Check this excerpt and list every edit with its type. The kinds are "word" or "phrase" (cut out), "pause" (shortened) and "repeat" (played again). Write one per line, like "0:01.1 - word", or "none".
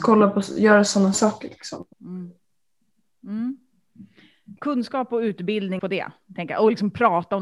0:01.1 - word
0:01.9 - pause
0:04.6 - pause
0:05.8 - phrase